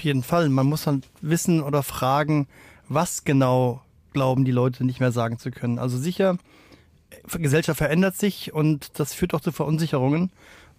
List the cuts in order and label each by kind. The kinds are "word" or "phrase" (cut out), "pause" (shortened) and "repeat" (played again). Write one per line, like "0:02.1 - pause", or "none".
none